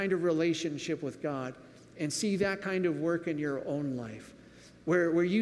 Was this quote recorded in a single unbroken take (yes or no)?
yes